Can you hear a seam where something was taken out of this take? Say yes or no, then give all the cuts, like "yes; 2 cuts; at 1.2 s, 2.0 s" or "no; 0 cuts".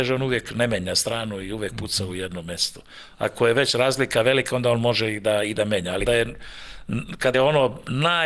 yes; 2 cuts; at 6.1 s, 7.3 s